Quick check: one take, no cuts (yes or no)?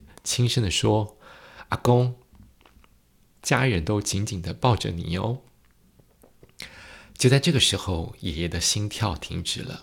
yes